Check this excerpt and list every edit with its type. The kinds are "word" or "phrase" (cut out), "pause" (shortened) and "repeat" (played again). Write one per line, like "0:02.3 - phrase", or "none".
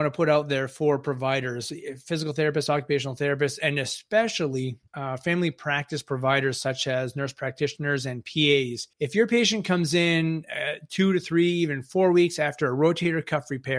0:04.9 - pause
0:08.9 - pause